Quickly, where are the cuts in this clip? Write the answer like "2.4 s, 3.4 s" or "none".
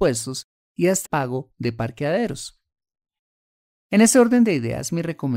1.0 s